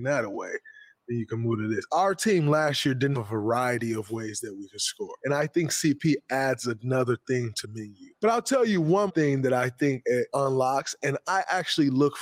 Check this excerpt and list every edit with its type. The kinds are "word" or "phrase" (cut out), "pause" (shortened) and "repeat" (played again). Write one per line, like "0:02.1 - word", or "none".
0:03.1 - word
0:07.6 - word
0:09.1 - word